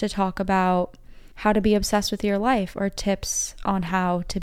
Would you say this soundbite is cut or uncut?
cut